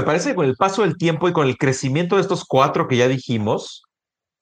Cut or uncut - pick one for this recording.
uncut